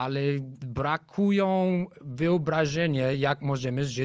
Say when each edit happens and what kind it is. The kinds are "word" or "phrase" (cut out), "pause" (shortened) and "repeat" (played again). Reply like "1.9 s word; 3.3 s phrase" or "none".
none